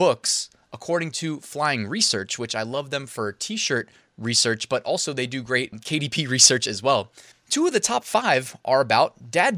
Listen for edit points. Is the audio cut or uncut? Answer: cut